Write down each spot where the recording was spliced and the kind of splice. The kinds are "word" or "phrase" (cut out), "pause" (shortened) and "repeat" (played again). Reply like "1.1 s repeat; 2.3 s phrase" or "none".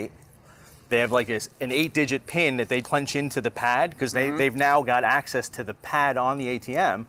2.8 s word